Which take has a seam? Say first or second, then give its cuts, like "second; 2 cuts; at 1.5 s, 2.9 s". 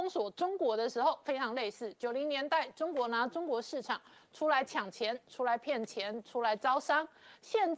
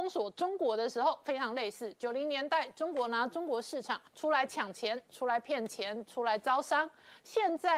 second; 1 cut; at 4.1 s